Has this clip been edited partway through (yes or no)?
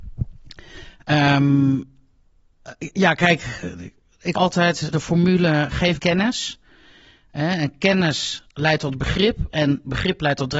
yes